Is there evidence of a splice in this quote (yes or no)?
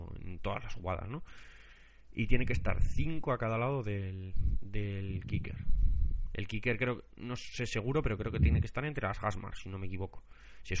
no